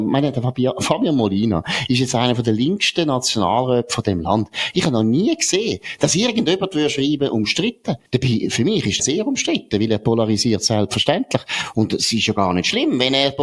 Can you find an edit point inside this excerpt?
yes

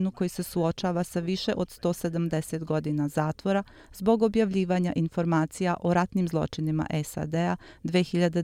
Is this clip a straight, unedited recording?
yes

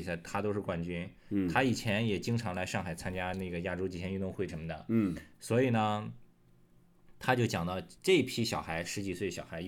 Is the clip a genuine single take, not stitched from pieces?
no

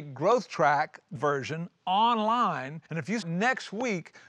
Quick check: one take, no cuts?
no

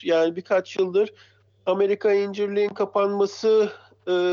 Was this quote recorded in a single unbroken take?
yes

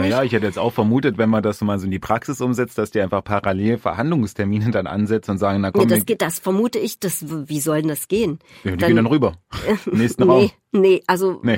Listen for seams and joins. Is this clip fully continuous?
yes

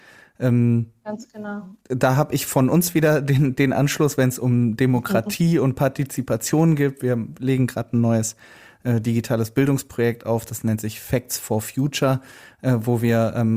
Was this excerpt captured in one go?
yes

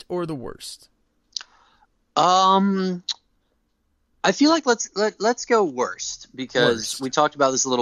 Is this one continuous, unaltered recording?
yes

